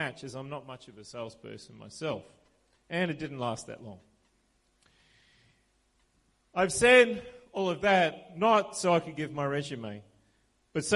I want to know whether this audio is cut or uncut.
uncut